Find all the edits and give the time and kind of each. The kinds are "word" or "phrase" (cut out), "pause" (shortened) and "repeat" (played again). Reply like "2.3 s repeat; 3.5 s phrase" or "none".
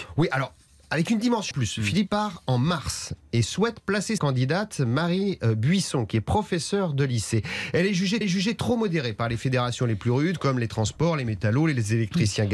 1.5 s word; 2.1 s word; 4.2 s word; 8.2 s repeat